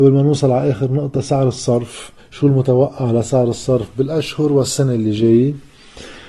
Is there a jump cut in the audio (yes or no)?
yes